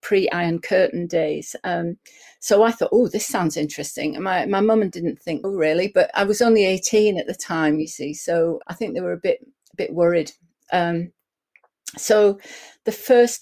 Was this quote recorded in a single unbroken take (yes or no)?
no